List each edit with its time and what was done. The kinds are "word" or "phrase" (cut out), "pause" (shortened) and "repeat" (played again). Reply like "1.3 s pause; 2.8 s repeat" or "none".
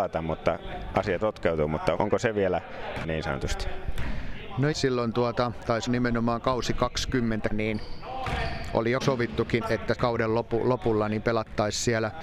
1.2 s word; 2.0 s word; 3.0 s word; 4.7 s word; 5.9 s word; 7.5 s word; 9.0 s word; 9.6 s word; 9.9 s word